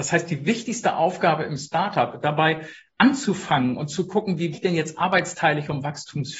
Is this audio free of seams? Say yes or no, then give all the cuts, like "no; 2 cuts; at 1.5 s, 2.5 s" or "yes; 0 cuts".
no; 1 cut; at 4.5 s